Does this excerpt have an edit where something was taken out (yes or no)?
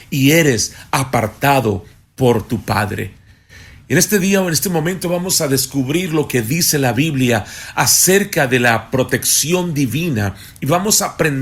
no